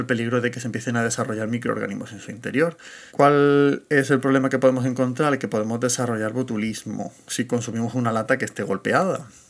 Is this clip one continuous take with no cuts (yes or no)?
no